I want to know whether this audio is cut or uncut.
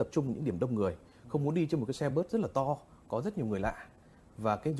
uncut